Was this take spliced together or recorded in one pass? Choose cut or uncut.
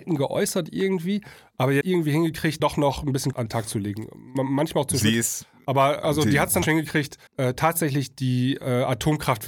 cut